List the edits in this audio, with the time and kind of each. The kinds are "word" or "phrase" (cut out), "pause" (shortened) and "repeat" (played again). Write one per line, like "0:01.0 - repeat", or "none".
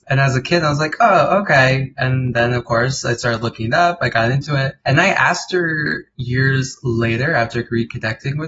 none